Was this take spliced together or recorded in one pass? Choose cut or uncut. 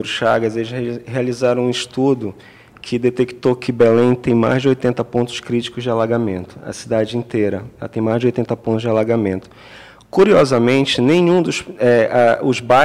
uncut